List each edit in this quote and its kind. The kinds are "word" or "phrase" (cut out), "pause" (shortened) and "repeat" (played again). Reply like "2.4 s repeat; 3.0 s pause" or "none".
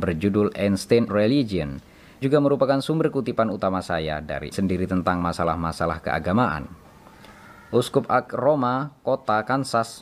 1.1 s word; 2.2 s word; 4.5 s word; 8.3 s word